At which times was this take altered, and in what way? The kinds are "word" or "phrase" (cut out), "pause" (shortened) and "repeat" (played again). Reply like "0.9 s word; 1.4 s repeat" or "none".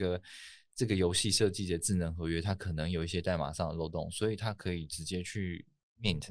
none